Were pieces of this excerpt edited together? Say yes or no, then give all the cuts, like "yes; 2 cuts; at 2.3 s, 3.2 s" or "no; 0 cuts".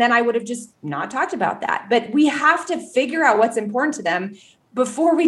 no; 0 cuts